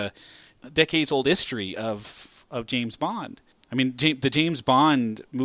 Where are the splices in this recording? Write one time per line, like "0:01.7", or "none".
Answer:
none